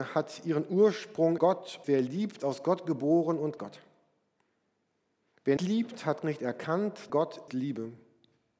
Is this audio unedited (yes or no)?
no